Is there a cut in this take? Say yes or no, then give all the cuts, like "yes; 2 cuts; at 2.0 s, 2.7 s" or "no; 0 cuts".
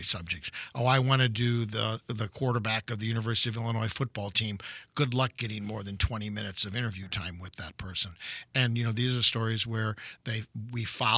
no; 0 cuts